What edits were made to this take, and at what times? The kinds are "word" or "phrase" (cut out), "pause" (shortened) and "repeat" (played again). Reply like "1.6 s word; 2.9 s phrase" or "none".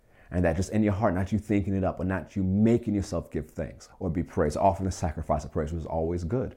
3.9 s pause